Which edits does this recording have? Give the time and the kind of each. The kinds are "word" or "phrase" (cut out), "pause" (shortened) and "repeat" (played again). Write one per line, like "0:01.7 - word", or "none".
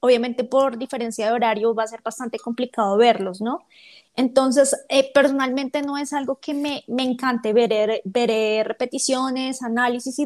none